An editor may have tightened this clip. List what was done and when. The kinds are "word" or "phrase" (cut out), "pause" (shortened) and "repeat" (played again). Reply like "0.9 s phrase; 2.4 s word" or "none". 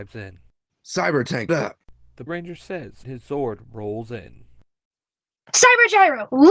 1.5 s word; 2.3 s word; 3.0 s word